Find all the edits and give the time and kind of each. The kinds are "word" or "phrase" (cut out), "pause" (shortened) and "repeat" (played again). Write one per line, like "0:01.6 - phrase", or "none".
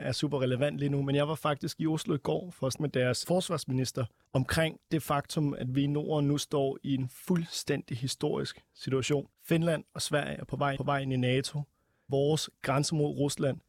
0:02.7 - word
0:03.2 - word
0:04.2 - pause
0:09.3 - pause
0:10.8 - repeat
0:12.1 - word